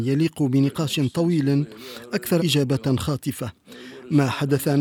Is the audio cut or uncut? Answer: cut